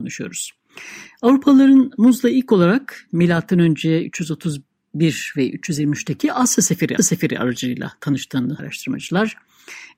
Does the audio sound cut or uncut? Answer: cut